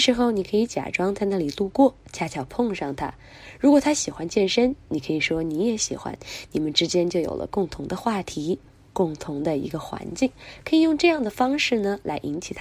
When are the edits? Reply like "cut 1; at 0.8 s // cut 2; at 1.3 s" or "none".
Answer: none